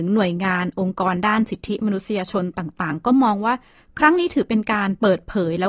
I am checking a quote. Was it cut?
yes; 1 cut; at 3.7 s

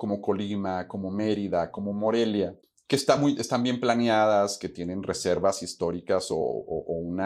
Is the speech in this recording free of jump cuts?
yes; 0 cuts

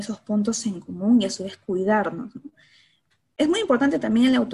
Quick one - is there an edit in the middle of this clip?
no; 0 cuts

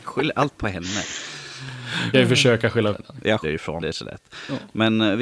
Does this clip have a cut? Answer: yes; 4 cuts; at 2.1 s, 2.9 s, 3.4 s, 3.8 s

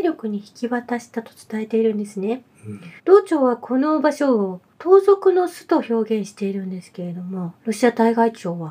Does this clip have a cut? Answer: yes; 1 cut; at 3.0 s

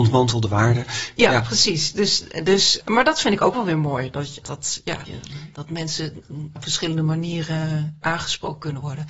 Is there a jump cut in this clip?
yes; 5 cuts; at 2.8 s, 4.4 s, 5.1 s, 6.6 s, 8.0 s

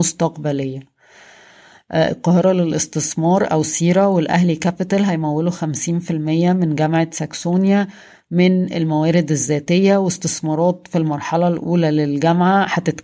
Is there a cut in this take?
no; 0 cuts

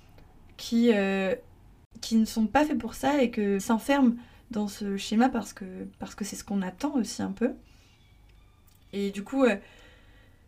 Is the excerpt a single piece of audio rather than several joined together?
no; 2 cuts; at 3.6 s, 5.9 s

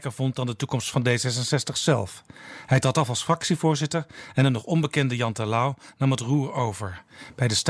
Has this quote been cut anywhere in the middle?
no; 0 cuts

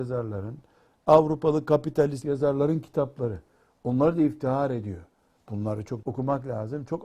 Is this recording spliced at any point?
yes; 2 cuts; at 2.2 s, 6.0 s

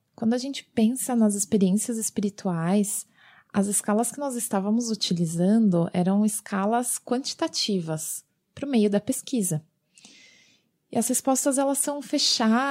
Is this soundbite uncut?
yes; 0 cuts

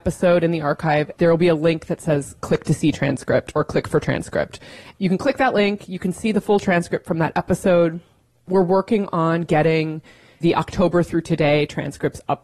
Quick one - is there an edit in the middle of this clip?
no; 0 cuts

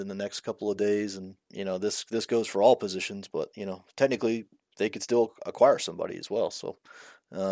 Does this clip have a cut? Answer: no; 0 cuts

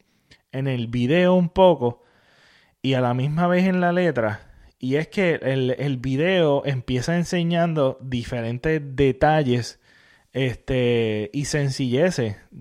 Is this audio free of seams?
yes; 0 cuts

